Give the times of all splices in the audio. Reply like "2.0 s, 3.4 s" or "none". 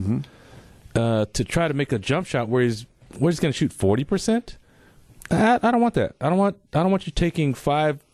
none